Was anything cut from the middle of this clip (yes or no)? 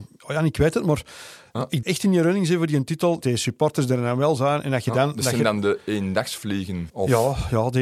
yes